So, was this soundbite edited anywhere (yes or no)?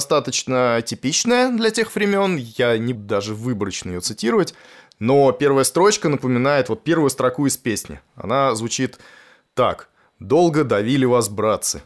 yes